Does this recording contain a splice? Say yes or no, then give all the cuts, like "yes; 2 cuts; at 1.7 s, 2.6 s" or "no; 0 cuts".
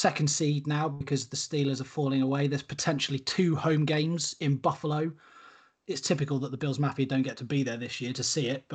no; 0 cuts